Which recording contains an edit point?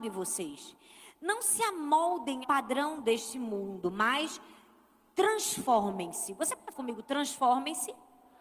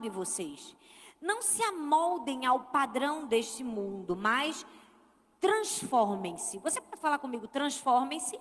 first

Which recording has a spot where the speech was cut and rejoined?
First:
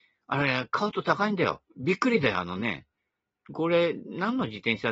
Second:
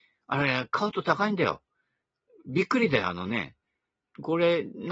first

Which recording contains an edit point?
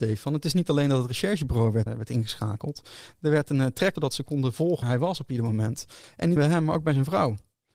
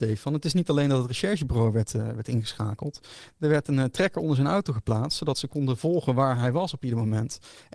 first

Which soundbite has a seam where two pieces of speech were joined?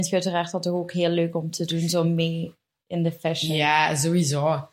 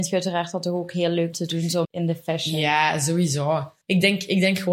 second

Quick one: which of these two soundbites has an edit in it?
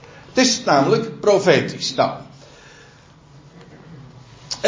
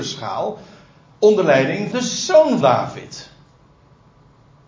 second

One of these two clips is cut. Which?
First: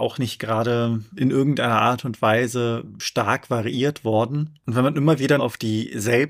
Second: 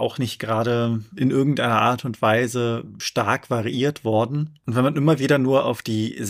first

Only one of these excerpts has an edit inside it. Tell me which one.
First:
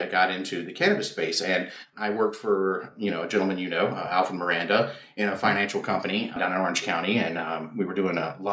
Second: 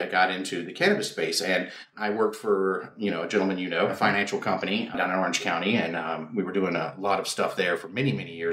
second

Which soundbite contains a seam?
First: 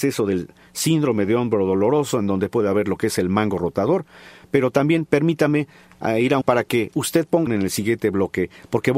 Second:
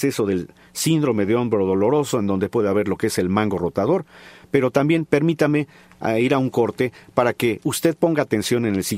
first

